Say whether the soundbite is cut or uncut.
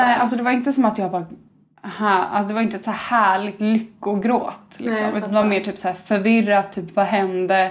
uncut